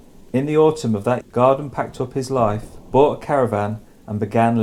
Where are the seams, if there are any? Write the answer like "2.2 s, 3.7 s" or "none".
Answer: 1.2 s